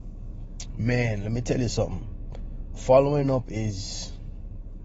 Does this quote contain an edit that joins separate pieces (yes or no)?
no